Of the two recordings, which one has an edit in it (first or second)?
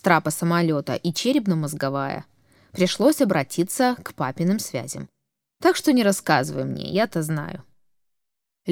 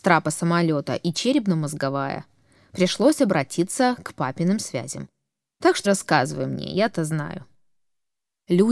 second